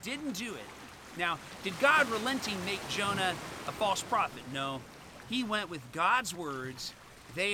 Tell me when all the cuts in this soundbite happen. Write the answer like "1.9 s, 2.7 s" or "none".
none